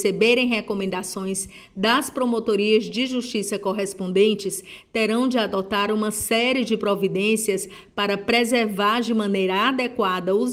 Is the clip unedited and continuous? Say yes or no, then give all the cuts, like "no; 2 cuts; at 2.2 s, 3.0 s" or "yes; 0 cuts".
yes; 0 cuts